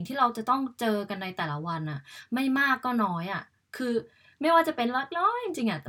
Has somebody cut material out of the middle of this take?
no; 0 cuts

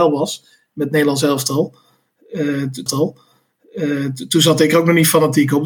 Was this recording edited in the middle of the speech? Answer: yes; 1 cut; at 2.9 s

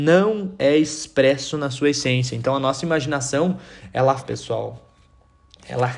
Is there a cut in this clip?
yes; 1 cut; at 4.2 s

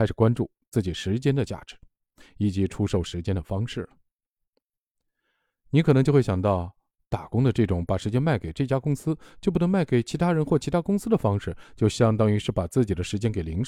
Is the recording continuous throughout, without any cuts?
yes; 0 cuts

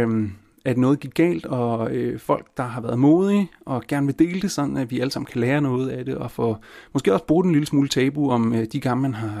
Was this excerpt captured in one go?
yes; 0 cuts

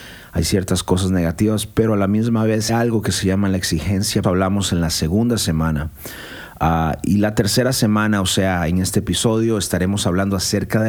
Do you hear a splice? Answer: yes; 2 cuts; at 2.7 s, 4.2 s

